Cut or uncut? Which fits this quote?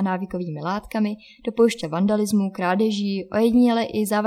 cut